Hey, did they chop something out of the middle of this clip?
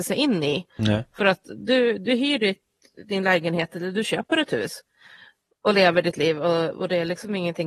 no; 0 cuts

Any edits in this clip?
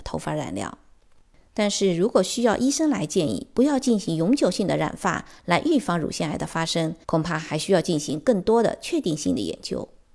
yes; 1 cut; at 7.0 s

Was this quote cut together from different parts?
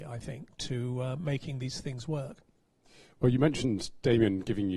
no; 0 cuts

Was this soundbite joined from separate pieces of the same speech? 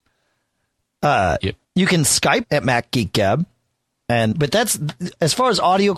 yes; 3 cuts; at 1.6 s, 2.4 s, 4.3 s

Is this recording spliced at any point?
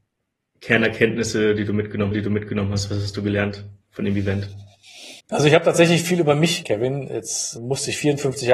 yes; 5 cuts; at 2.1 s, 3.8 s, 5.2 s, 6.6 s, 7.6 s

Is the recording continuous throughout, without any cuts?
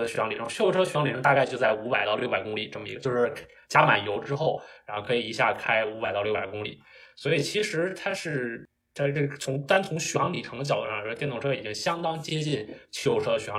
yes; 0 cuts

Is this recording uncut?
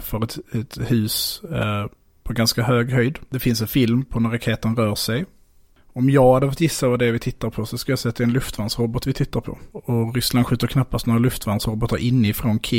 yes; 0 cuts

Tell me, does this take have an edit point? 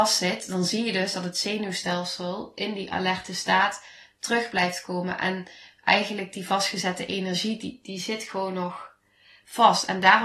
no; 0 cuts

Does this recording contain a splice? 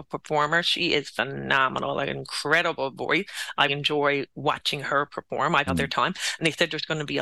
yes; 2 cuts; at 3.7 s, 5.7 s

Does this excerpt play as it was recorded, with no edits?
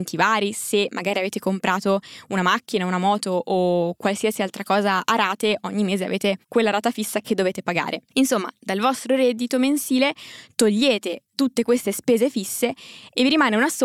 yes; 0 cuts

